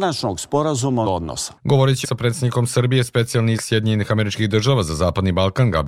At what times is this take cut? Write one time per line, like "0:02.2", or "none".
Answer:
0:01.1
0:02.0
0:03.6